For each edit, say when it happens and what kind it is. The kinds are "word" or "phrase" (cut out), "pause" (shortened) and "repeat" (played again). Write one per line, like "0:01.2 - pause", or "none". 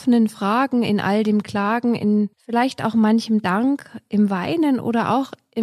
0:02.3 - pause